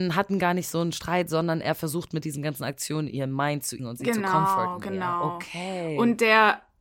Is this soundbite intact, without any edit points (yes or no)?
no